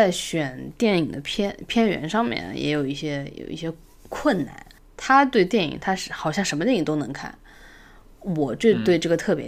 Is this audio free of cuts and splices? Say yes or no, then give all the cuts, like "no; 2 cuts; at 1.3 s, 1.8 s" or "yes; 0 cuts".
no; 1 cut; at 4.8 s